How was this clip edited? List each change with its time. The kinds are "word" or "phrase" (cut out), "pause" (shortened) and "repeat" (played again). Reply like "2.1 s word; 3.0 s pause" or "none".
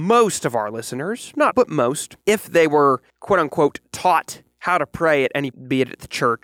1.5 s word; 2.2 s pause; 3.1 s pause; 5.5 s phrase